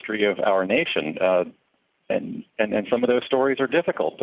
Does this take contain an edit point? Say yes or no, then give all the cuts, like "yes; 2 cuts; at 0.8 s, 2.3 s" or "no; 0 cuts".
no; 0 cuts